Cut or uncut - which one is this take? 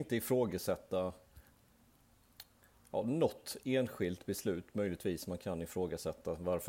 uncut